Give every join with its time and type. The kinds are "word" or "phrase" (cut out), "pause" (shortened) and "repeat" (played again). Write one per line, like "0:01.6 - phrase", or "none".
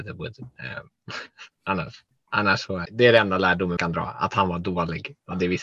0:02.9 - word
0:03.8 - word